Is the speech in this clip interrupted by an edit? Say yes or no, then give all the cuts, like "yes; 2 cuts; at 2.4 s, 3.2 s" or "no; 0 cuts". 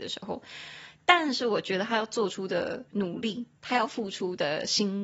yes; 1 cut; at 2.9 s